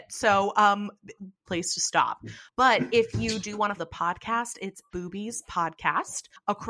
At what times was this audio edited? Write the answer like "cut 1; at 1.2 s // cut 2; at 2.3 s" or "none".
cut 1; at 1.5 s // cut 2; at 3.8 s // cut 3; at 4.9 s